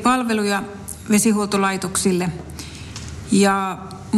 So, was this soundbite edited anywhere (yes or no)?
no